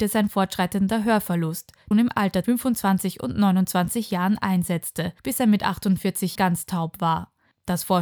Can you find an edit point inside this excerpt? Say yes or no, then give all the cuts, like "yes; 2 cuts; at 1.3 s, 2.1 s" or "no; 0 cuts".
yes; 4 cuts; at 1.9 s, 2.4 s, 5.2 s, 6.4 s